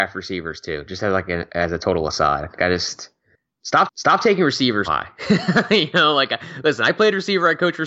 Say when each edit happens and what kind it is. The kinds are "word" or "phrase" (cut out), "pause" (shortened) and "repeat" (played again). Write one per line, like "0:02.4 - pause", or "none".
0:02.6 - word
0:03.9 - repeat
0:04.8 - word